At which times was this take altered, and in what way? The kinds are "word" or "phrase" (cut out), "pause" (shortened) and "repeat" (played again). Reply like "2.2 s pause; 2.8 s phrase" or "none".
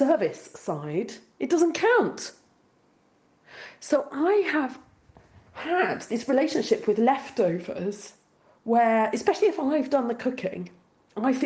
none